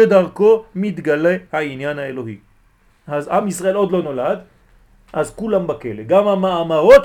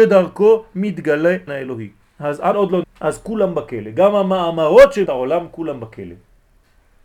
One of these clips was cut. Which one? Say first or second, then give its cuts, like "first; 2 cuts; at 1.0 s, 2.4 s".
second; 5 cuts; at 1.5 s, 2.0 s, 2.5 s, 2.8 s, 5.1 s